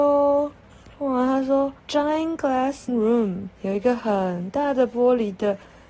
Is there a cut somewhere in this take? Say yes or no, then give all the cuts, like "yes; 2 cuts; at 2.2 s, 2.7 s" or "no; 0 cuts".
yes; 4 cuts; at 0.9 s, 1.8 s, 2.9 s, 3.6 s